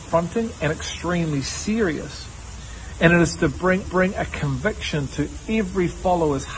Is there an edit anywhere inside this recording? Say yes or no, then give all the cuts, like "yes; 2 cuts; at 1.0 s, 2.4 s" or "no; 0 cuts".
yes; 1 cut; at 3.8 s